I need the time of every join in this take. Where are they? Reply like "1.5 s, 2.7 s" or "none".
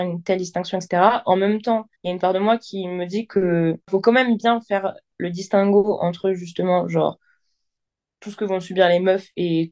2.0 s, 3.8 s